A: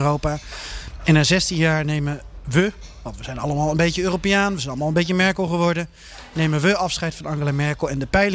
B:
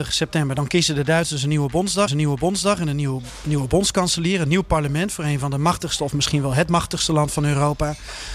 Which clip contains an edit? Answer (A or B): B